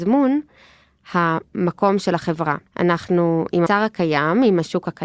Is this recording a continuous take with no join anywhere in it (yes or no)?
no